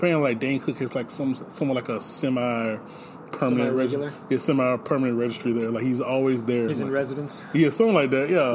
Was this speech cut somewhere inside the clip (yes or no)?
no